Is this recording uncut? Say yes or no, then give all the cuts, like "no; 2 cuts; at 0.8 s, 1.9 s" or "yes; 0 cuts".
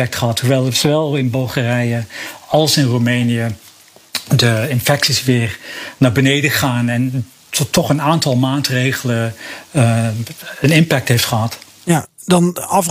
yes; 0 cuts